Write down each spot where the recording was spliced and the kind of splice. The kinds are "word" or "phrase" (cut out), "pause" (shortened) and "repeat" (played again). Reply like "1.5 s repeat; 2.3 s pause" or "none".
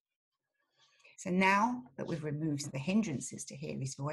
1.1 s pause; 2.6 s word